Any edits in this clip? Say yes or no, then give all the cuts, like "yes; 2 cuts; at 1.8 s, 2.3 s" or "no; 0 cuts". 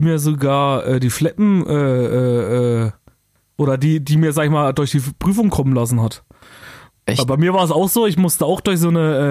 no; 0 cuts